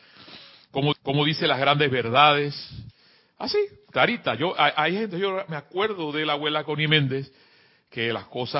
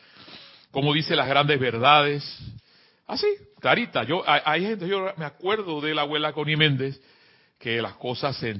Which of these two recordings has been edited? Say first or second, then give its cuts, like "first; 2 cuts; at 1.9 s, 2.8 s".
first; 1 cut; at 0.9 s